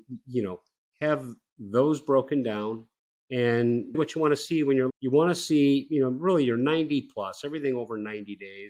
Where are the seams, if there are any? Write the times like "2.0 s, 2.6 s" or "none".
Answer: 3.9 s, 4.9 s